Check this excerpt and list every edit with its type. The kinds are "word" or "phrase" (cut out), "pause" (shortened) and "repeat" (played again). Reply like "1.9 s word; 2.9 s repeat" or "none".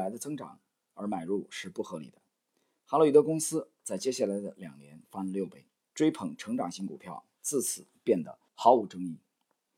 8.5 s pause